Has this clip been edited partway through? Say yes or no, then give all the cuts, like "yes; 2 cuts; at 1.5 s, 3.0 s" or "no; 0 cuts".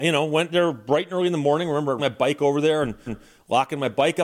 yes; 2 cuts; at 2.0 s, 3.1 s